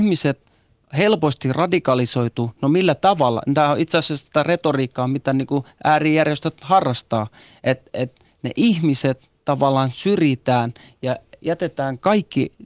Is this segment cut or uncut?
uncut